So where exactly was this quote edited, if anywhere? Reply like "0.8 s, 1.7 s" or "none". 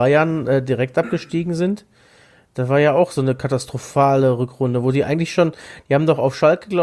none